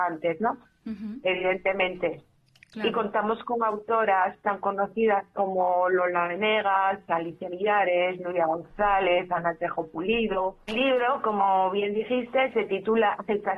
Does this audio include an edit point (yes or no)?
no